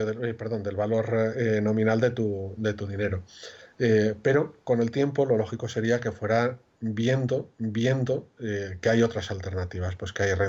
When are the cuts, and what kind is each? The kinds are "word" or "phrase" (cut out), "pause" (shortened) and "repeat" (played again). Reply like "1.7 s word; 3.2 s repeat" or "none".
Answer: 7.5 s repeat

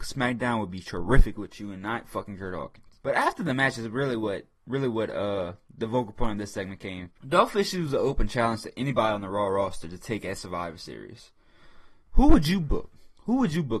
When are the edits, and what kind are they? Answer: 3.0 s pause; 7.2 s pause; 12.0 s pause

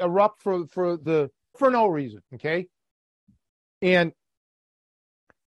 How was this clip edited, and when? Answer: 1.1 s word; 1.5 s phrase; 2.2 s pause

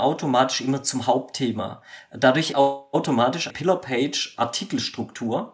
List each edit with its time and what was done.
2.5 s word; 3.5 s word

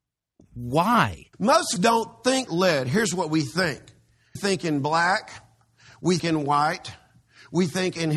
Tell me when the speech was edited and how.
1.3 s pause; 1.8 s word; 2.5 s word; 4.4 s word; 6.2 s word

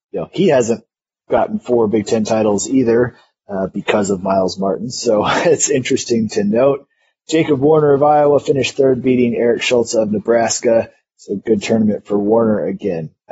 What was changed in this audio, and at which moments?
none

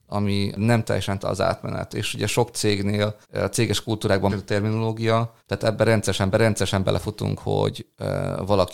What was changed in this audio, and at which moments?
1.2 s word; 3.2 s pause; 4.3 s word; 5.4 s pause; 6.3 s repeat

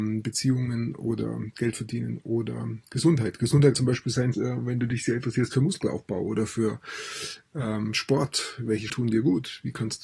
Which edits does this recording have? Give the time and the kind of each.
3.7 s word; 4.3 s word; 8.9 s word

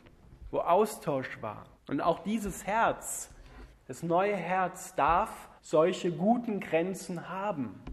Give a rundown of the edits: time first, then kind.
1.8 s pause; 5.6 s pause

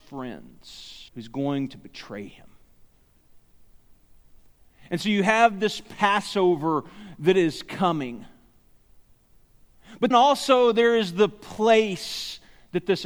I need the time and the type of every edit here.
1.1 s pause; 10.1 s word

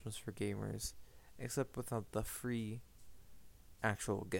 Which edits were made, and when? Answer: none

